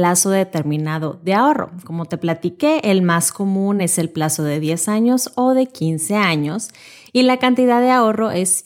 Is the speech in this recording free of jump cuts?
yes; 0 cuts

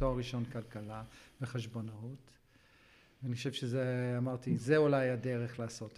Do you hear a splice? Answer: no; 0 cuts

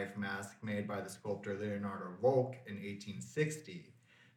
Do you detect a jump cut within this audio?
no; 0 cuts

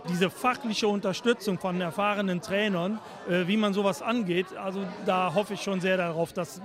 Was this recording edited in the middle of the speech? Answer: no; 0 cuts

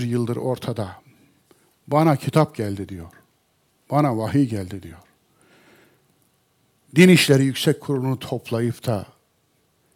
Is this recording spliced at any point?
no; 0 cuts

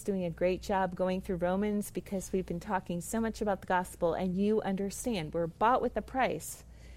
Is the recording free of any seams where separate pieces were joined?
yes; 0 cuts

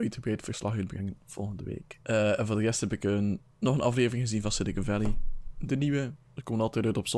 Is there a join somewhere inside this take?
yes; 2 cuts; at 2.0 s, 3.5 s

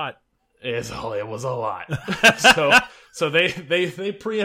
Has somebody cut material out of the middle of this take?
no; 0 cuts

